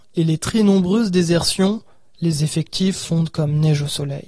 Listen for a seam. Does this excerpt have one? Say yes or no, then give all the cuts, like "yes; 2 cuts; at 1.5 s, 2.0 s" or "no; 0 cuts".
no; 0 cuts